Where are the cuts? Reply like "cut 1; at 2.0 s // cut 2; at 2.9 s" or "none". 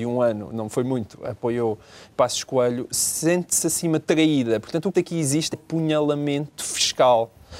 cut 1; at 2.1 s // cut 2; at 4.0 s // cut 3; at 4.9 s // cut 4; at 5.5 s